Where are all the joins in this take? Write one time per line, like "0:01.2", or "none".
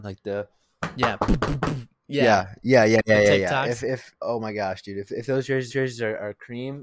0:05.7